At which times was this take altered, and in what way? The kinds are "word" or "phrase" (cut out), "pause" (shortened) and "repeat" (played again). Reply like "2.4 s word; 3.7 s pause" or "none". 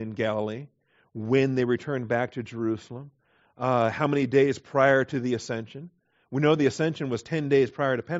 none